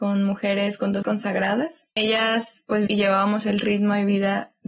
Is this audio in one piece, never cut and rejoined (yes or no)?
no